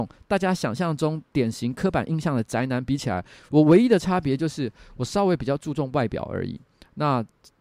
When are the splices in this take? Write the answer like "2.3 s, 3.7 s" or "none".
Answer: none